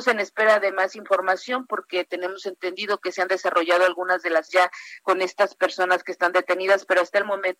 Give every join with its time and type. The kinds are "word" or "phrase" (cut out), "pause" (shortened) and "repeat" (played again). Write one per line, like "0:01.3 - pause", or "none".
0:04.5 - word

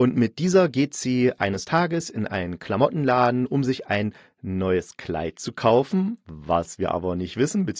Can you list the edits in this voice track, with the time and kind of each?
none

